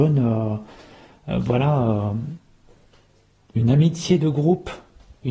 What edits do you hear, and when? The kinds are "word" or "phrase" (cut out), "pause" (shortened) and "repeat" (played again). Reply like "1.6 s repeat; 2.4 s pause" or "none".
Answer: none